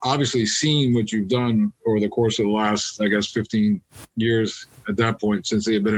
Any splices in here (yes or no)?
yes